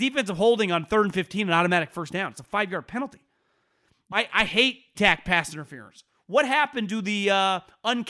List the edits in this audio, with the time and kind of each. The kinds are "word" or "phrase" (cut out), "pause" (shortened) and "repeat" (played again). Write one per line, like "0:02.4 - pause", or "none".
0:04.1 - word
0:05.0 - word